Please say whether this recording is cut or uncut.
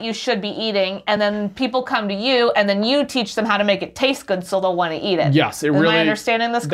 uncut